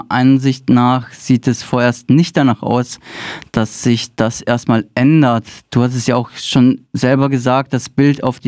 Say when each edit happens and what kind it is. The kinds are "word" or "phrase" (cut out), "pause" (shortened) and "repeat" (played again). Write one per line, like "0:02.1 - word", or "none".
none